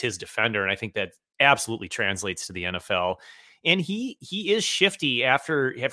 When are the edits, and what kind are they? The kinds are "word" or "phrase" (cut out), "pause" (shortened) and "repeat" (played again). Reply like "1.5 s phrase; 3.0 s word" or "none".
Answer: none